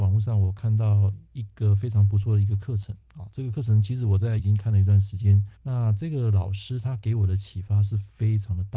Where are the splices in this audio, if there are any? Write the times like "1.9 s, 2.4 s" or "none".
3.0 s, 4.4 s, 5.6 s

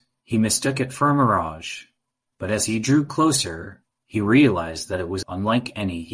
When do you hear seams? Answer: 5.2 s

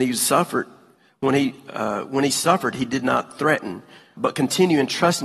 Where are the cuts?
4.2 s

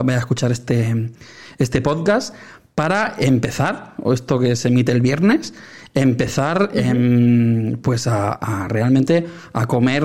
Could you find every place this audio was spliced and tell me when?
none

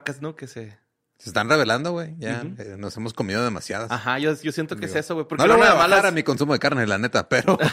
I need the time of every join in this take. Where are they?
none

